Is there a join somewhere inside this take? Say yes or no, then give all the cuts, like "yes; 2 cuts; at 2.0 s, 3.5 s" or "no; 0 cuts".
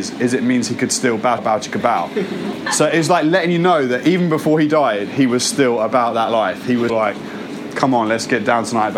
yes; 2 cuts; at 1.4 s, 6.9 s